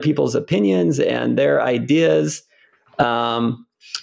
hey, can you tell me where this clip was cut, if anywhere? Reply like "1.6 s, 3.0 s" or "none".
none